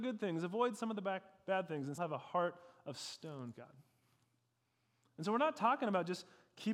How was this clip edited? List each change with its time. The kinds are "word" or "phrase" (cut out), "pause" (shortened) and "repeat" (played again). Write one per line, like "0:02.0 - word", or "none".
0:02.0 - word
0:03.5 - word